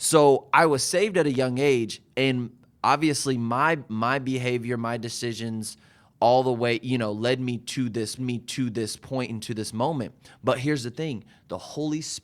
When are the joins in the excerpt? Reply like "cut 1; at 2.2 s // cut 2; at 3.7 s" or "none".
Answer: cut 1; at 8.2 s